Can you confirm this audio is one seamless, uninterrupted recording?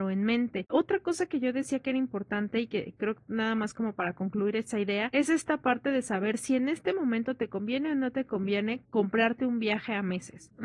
yes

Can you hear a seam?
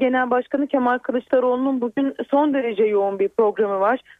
no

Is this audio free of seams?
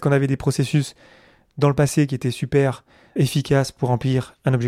no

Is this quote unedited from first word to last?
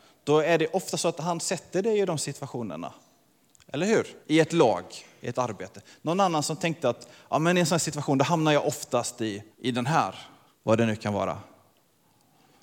no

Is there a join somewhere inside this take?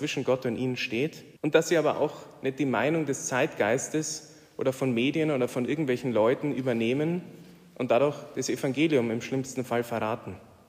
yes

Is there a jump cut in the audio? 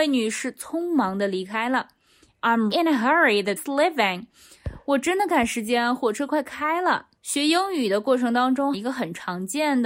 yes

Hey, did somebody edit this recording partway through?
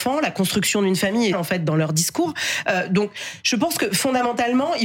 yes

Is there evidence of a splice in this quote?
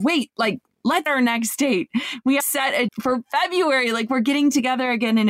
yes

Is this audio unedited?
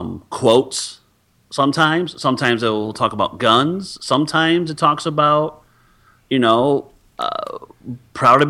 yes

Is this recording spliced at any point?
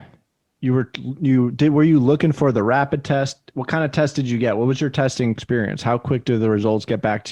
no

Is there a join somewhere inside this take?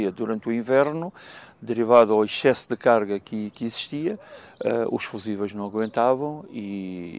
no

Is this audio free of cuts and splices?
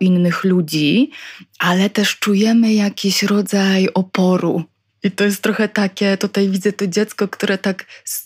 yes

